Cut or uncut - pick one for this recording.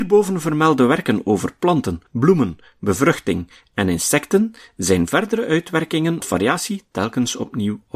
cut